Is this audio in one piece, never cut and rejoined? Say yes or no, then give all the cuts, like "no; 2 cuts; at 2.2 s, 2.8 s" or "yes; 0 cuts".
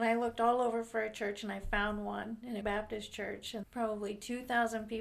no; 2 cuts; at 2.6 s, 3.6 s